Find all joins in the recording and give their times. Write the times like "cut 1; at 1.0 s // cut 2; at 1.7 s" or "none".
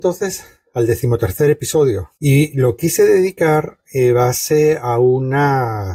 cut 1; at 2.2 s